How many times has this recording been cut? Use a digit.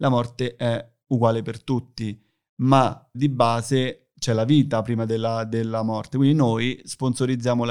1